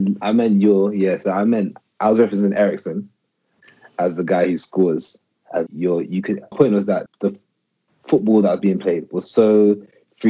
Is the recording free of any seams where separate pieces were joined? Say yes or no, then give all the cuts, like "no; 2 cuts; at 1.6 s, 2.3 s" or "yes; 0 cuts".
no; 3 cuts; at 5.7 s, 6.5 s, 7.1 s